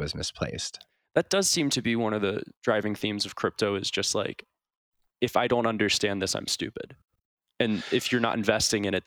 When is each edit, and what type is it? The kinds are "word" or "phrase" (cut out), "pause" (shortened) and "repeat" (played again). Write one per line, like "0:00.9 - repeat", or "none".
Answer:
0:02.5 - pause

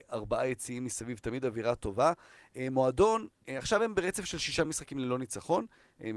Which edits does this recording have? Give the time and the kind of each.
none

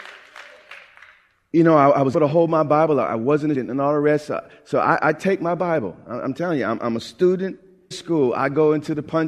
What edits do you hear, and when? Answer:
0:02.1 - word
0:03.5 - word
0:07.9 - word

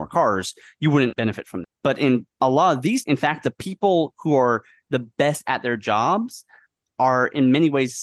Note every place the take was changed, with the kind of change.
0:01.1 - word
0:01.6 - word
0:03.0 - word

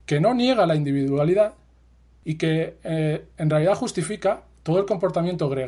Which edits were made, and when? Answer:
none

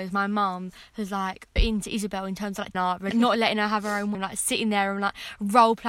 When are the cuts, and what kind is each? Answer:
0:01.6 - word
0:02.7 - word
0:03.1 - word
0:04.1 - word

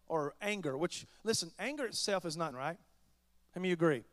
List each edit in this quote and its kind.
0:02.5 - word

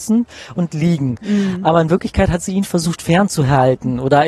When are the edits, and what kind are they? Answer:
none

